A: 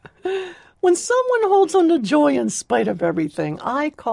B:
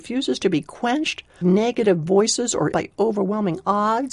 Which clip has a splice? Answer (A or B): B